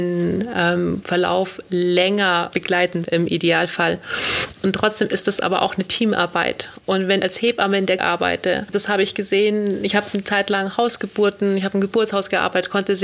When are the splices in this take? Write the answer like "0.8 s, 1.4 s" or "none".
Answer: 2.5 s, 3.0 s, 7.2 s, 8.0 s